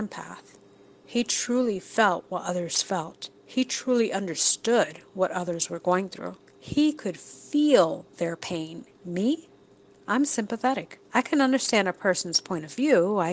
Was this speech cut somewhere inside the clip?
yes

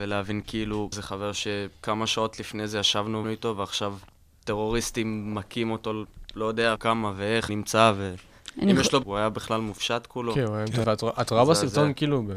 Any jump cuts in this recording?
yes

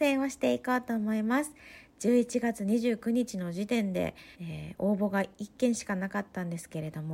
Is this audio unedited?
no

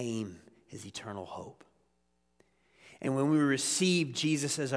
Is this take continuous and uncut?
yes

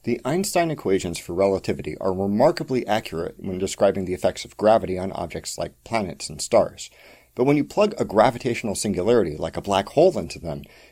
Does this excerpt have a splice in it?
no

